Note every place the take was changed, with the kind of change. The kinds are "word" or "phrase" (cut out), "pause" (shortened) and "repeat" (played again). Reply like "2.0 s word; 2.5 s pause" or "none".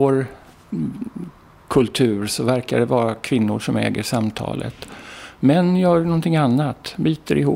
none